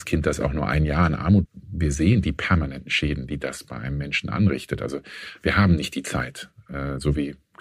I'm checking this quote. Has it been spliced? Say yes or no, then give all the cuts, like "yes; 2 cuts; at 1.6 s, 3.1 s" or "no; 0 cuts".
yes; 1 cut; at 1.4 s